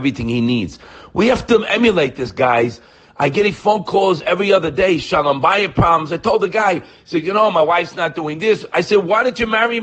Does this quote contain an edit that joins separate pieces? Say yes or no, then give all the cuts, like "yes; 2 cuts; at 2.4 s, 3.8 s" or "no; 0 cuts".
no; 0 cuts